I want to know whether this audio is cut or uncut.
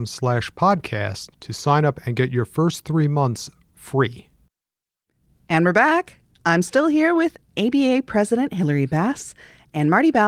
uncut